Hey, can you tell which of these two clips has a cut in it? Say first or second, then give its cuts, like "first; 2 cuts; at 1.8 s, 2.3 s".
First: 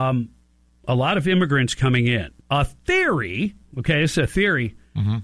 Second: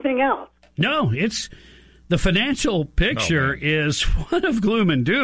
first; 1 cut; at 2.4 s